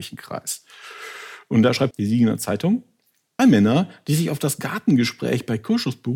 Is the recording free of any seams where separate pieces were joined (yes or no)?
no